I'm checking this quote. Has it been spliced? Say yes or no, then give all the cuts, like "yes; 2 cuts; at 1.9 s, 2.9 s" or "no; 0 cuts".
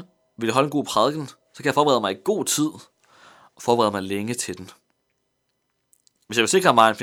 no; 0 cuts